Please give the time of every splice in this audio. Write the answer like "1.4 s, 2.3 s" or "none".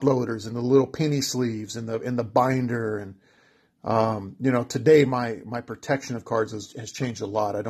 none